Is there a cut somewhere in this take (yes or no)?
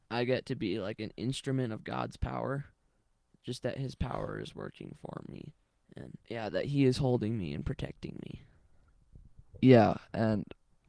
no